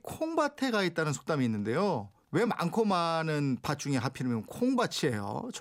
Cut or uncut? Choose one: uncut